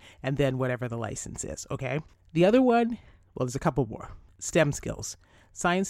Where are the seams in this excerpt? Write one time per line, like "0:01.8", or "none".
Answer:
none

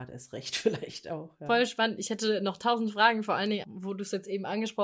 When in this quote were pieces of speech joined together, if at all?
0:03.6

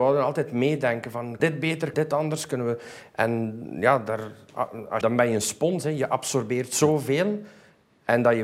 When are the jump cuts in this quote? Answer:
0:01.4
0:01.9
0:05.0

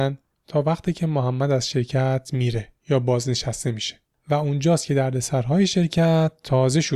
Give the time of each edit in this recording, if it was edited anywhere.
none

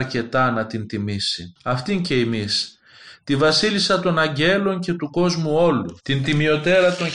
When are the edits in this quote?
0:01.6
0:06.0

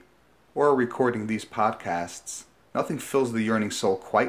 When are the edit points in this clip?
0:02.6

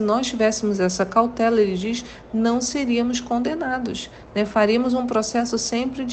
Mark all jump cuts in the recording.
none

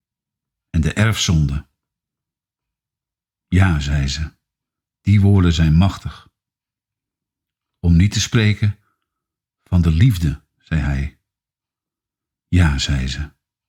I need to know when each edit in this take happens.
none

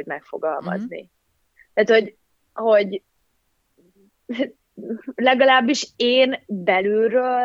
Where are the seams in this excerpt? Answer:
none

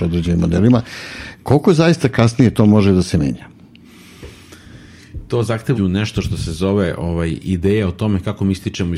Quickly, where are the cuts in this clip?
0:05.7

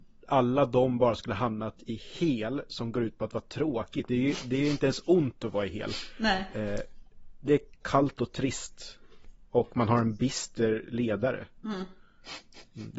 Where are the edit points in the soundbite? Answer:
none

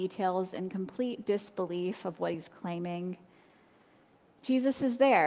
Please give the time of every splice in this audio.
none

